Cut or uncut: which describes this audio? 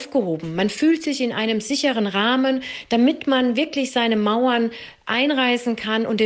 uncut